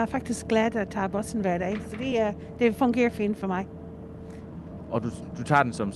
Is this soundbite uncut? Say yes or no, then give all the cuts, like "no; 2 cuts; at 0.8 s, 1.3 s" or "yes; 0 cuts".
yes; 0 cuts